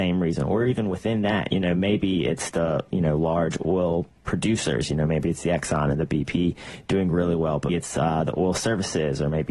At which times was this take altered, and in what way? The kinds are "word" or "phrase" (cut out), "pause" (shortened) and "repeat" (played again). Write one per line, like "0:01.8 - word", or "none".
0:07.7 - word